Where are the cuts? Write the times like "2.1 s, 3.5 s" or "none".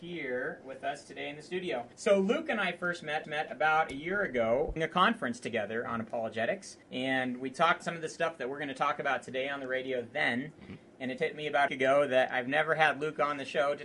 1.9 s, 3.2 s, 4.8 s, 6.8 s, 7.8 s, 11.2 s, 11.7 s